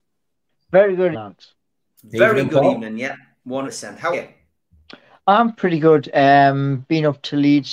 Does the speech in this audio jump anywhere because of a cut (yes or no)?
yes